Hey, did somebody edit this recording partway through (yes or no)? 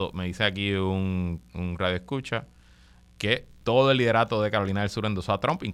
yes